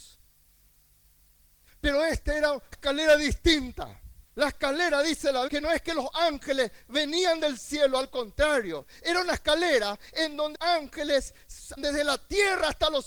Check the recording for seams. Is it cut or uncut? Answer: cut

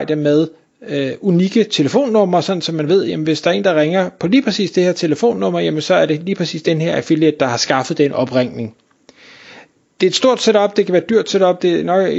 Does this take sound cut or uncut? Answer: uncut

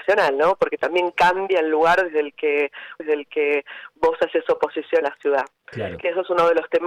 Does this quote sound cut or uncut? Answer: cut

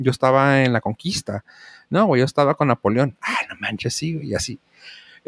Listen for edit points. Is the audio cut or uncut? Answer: uncut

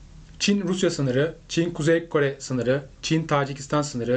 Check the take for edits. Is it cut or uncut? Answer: uncut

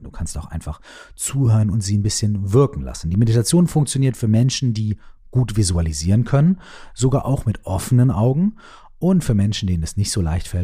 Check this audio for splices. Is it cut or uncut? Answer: uncut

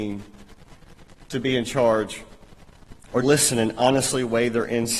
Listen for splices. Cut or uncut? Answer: cut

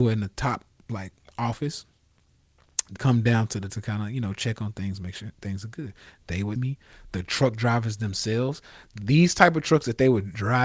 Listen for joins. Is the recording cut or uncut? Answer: cut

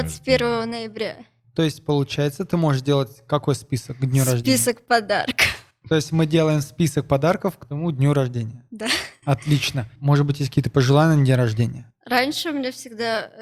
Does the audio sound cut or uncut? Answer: uncut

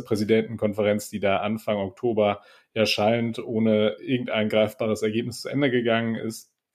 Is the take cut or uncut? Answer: uncut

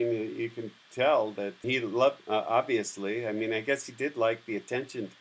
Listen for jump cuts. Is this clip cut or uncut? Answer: cut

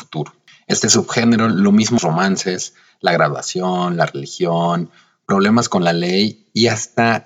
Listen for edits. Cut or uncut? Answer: cut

